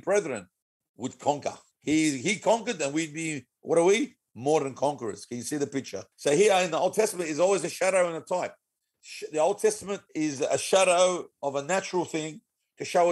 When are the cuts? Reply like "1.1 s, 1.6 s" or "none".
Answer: 1.7 s, 3.6 s, 6.1 s, 10.1 s, 11.3 s